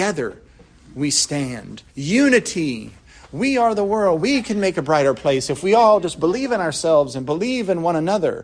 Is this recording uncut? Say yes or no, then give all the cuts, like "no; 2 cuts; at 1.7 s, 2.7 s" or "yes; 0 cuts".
no; 1 cut; at 1.9 s